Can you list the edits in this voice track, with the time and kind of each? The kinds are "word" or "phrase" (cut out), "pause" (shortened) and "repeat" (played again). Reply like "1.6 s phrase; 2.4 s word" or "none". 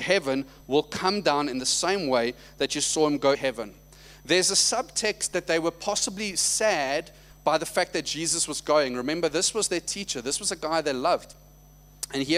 3.3 s word